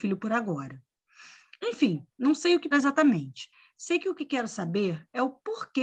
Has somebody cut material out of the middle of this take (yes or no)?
yes